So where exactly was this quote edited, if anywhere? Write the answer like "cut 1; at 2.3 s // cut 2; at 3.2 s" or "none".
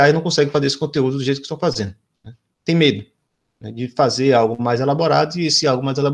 none